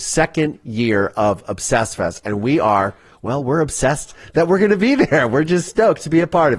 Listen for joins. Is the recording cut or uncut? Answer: uncut